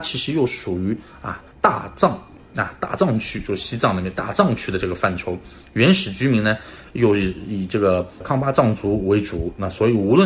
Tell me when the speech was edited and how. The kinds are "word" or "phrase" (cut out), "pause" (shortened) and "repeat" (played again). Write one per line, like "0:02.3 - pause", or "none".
0:01.5 - pause